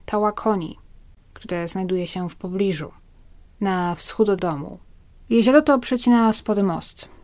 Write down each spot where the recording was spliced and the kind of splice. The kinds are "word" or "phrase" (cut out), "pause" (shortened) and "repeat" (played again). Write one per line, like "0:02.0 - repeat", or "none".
0:04.4 - word